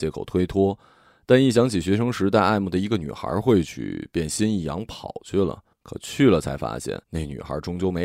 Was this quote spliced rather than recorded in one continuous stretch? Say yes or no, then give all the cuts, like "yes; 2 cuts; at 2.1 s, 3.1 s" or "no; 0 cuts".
yes; 2 cuts; at 5.7 s, 7.0 s